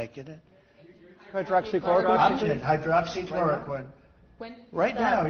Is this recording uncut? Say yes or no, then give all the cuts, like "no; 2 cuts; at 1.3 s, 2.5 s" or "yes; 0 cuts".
no; 1 cut; at 2.4 s